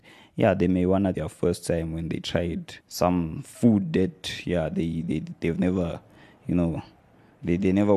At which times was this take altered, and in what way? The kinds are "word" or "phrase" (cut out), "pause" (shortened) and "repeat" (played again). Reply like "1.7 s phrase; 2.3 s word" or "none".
1.1 s phrase; 2.8 s pause